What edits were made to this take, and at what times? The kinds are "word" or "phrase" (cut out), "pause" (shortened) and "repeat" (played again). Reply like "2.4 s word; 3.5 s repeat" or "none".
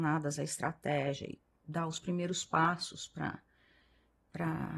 1.5 s pause